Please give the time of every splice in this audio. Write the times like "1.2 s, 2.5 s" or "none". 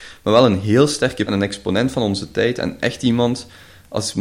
1.3 s

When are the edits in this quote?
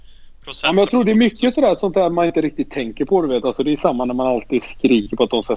none

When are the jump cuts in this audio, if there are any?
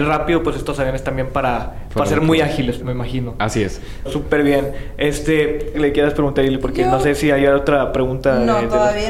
2.8 s, 4.1 s, 5.7 s

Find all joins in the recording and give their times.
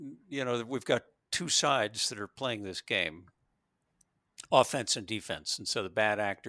none

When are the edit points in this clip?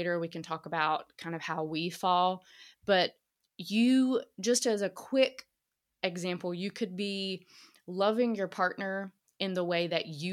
none

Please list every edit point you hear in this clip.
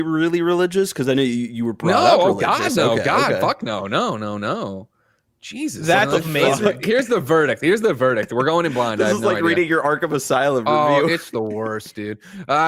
none

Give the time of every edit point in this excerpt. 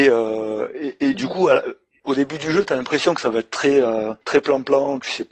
none

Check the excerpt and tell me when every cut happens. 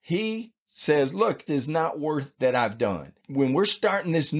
1.5 s, 2.4 s

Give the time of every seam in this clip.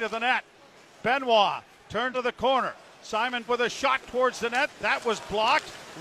2.1 s, 3.5 s

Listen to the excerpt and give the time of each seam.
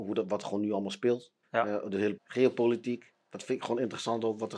1.4 s, 2.2 s

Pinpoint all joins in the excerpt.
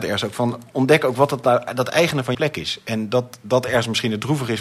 2.3 s

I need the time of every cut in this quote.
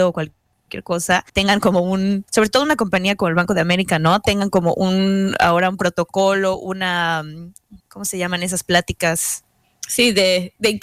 1.3 s, 2.3 s, 7.8 s

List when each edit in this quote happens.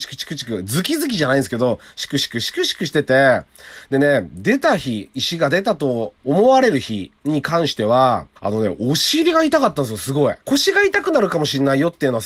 6.2 s, 7.2 s, 8.4 s, 10.4 s

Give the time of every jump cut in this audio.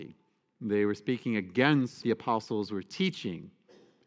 2.0 s

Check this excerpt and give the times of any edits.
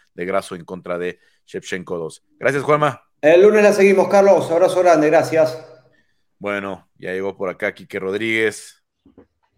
2.3 s, 3.1 s

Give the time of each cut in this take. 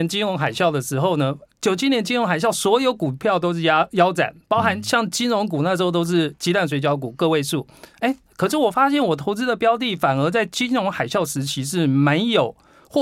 1.5 s

